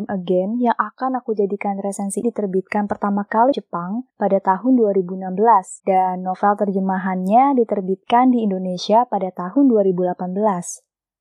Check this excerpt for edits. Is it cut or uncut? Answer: cut